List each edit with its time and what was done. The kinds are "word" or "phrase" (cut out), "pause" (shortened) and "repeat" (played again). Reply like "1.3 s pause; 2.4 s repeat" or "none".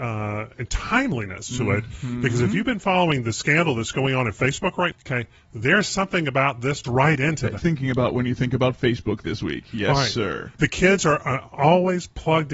4.9 s word; 6.8 s phrase; 7.6 s phrase